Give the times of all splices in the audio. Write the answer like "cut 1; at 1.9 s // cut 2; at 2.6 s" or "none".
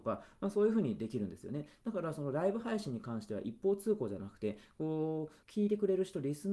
cut 1; at 5.4 s